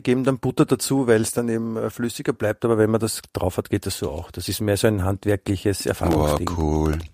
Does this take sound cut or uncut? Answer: uncut